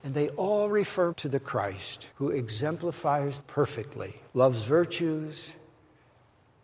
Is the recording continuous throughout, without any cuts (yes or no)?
no